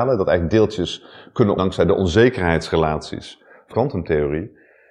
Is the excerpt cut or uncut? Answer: cut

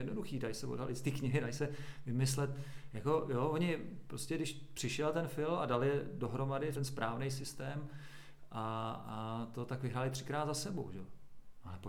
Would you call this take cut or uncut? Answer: cut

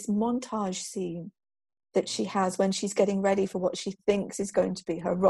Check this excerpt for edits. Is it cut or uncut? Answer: uncut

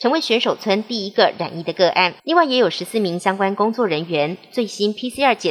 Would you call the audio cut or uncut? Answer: cut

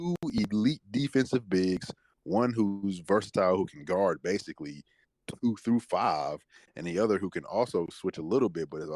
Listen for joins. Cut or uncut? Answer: uncut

